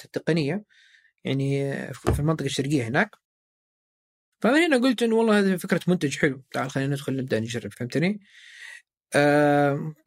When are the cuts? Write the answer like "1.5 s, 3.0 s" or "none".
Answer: 7.7 s